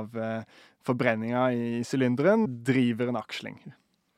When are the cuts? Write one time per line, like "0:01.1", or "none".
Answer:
0:02.5